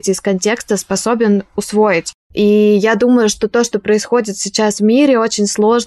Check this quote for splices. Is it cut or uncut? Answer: uncut